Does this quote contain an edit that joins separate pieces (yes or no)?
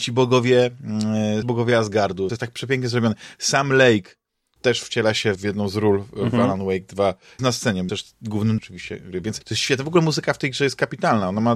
yes